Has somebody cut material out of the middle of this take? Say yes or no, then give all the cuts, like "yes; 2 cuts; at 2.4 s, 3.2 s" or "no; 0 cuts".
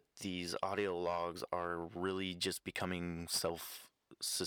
no; 0 cuts